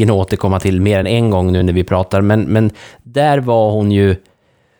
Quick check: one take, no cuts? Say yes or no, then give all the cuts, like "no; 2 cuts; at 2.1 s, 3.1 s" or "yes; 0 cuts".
yes; 0 cuts